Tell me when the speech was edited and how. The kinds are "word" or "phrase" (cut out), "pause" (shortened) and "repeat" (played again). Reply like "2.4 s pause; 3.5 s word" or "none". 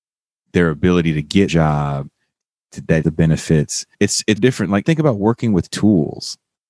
1.5 s word; 3.0 s word; 3.9 s pause; 4.4 s word; 4.8 s word